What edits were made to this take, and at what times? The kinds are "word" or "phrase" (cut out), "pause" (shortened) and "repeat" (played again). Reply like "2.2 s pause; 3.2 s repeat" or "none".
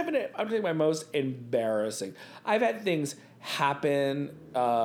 none